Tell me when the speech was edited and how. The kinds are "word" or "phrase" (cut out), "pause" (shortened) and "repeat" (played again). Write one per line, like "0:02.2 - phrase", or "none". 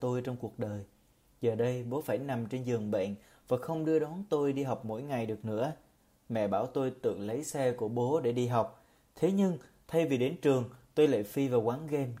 none